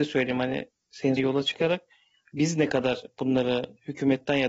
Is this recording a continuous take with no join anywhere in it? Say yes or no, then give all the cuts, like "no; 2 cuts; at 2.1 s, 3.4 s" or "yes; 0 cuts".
no; 1 cut; at 1.2 s